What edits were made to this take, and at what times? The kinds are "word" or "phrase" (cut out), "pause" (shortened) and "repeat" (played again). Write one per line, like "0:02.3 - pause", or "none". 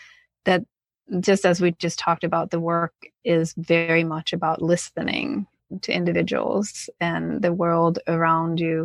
none